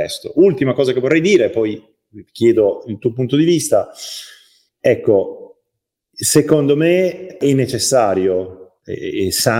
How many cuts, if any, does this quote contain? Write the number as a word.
zero